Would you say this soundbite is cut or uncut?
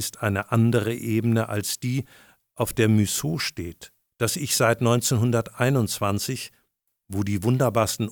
uncut